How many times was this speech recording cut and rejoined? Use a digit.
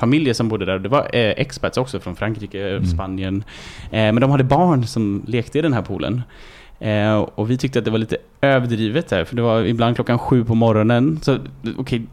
0